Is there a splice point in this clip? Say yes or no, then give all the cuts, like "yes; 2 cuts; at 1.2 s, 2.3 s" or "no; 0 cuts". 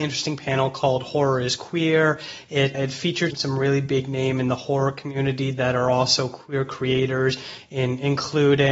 yes; 2 cuts; at 2.7 s, 3.3 s